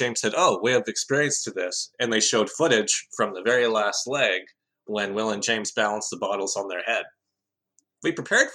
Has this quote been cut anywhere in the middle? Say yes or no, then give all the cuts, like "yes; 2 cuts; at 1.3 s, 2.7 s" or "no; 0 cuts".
no; 0 cuts